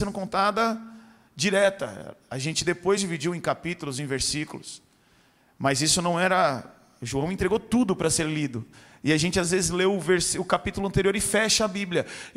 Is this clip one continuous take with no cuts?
yes; 0 cuts

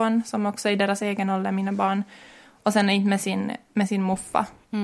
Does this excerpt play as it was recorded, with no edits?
yes; 0 cuts

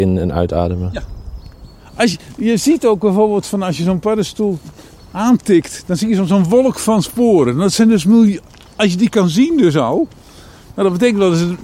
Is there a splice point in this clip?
no; 0 cuts

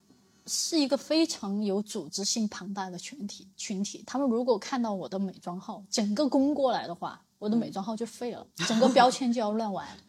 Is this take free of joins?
no; 2 cuts; at 3.5 s, 8.5 s

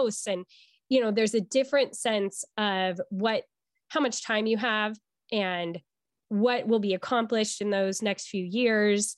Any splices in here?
no; 0 cuts

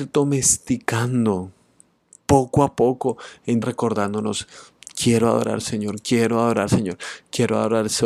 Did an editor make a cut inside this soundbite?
yes; 3 cuts; at 3.6 s, 5.6 s, 6.7 s

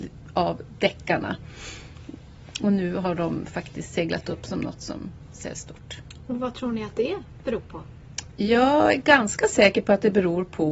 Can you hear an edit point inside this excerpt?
no; 0 cuts

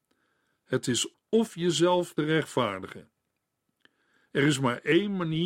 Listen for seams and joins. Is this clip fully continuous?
no; 2 cuts; at 1.1 s, 2.2 s

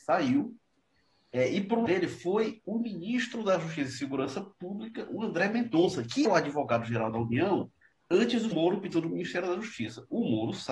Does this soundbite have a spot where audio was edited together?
yes; 5 cuts; at 1.9 s, 6.2 s, 8.0 s, 8.5 s, 8.9 s

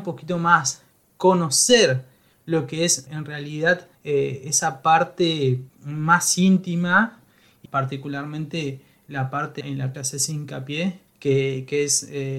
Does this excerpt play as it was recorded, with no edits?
no; 7 cuts; at 3.1 s, 3.9 s, 5.7 s, 7.7 s, 9.6 s, 9.9 s, 11.1 s

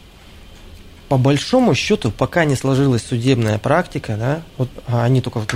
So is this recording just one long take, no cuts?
yes; 0 cuts

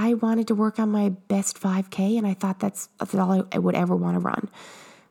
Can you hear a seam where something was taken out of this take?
no; 0 cuts

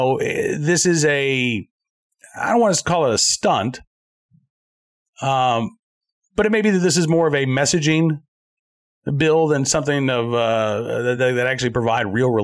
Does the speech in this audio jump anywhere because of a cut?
no; 0 cuts

